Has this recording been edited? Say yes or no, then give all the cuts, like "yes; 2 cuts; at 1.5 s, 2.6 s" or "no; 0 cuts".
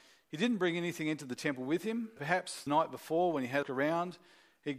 yes; 3 cuts; at 2.2 s, 2.7 s, 3.6 s